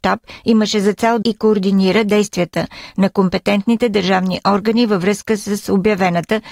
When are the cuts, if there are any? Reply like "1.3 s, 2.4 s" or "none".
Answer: 1.2 s

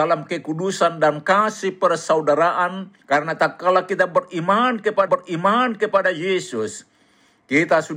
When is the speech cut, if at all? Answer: 3.0 s, 5.1 s

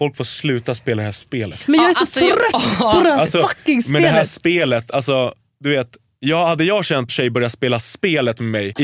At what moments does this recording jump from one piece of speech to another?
7.1 s

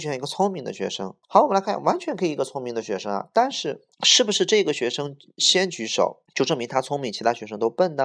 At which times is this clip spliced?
1.2 s, 3.9 s, 6.3 s

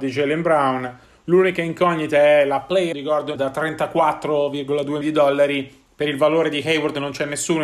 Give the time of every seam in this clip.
2.9 s, 3.3 s, 5.0 s

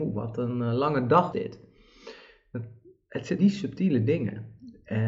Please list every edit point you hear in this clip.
1.3 s, 3.4 s

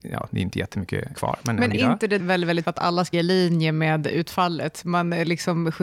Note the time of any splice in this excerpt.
1.1 s, 1.7 s, 2.2 s, 2.6 s, 3.1 s

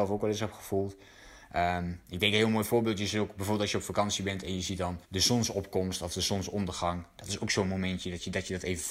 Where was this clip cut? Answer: 5.0 s

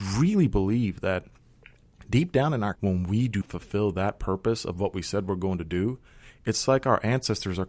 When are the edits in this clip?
2.7 s, 3.4 s

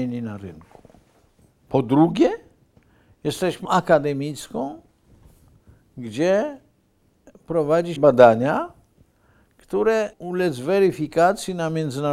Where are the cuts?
3.6 s, 8.0 s, 10.1 s

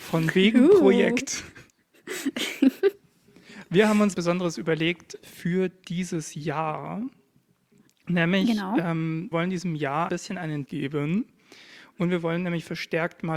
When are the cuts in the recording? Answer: 4.1 s, 5.2 s, 9.3 s, 10.1 s, 10.7 s

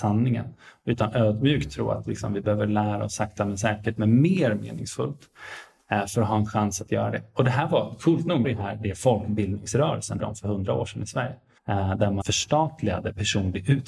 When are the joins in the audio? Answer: 4.0 s, 8.4 s, 10.2 s, 11.6 s, 12.2 s

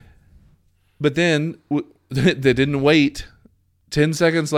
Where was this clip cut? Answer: none

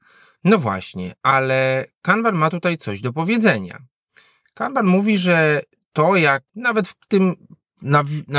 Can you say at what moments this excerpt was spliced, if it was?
6.5 s

